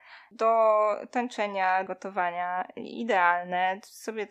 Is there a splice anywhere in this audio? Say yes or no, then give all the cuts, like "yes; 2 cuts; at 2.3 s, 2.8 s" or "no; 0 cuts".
yes; 1 cut; at 1.9 s